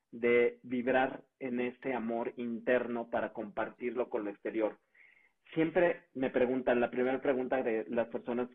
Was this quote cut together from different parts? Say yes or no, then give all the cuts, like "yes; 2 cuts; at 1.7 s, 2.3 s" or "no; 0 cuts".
no; 0 cuts